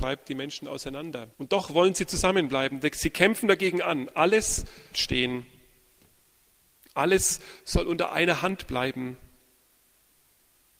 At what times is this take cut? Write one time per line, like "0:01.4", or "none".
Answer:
0:01.3
0:04.9